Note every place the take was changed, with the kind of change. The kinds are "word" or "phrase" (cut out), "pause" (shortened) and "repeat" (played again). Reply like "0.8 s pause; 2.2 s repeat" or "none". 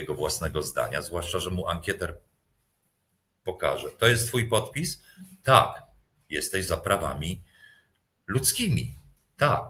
none